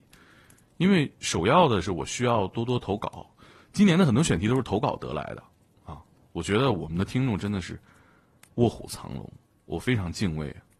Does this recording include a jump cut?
no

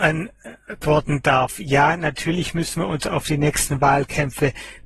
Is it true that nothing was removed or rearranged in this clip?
yes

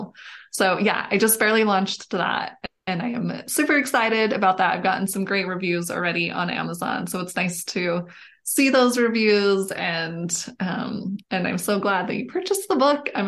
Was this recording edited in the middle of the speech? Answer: no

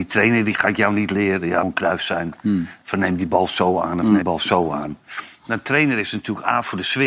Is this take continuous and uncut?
no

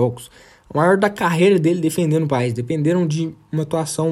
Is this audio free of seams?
yes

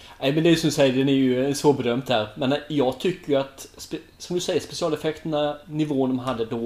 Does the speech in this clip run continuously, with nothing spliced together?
yes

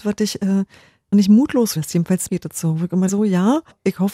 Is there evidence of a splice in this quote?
yes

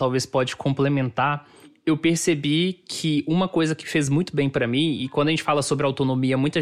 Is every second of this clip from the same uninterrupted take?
yes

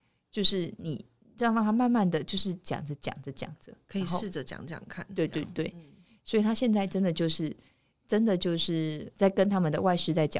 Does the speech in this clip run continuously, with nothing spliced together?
yes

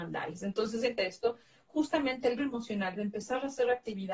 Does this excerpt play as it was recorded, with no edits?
no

